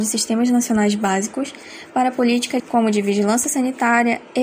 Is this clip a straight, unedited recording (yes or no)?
no